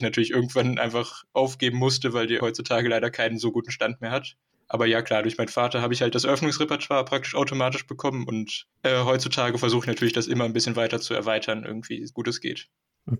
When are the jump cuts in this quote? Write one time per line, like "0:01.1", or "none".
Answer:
0:02.4
0:04.5
0:08.7
0:12.1